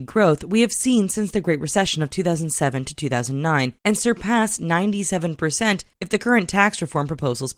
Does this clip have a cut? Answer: yes; 2 cuts; at 3.8 s, 5.9 s

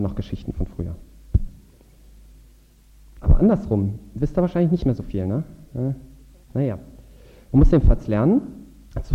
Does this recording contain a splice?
no; 0 cuts

